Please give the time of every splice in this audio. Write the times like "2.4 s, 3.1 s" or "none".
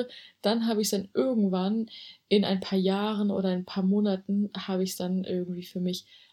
none